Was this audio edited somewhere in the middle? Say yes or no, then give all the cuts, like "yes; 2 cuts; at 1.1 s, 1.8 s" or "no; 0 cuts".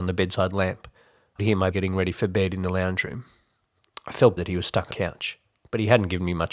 yes; 4 cuts; at 1.4 s, 1.7 s, 4.4 s, 4.9 s